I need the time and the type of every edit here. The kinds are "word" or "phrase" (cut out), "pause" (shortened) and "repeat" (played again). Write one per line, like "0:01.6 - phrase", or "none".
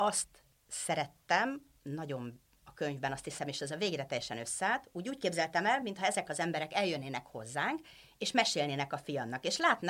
none